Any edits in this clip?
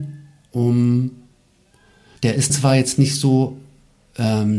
yes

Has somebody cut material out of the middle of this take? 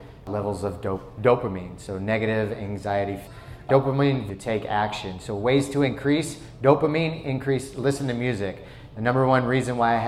yes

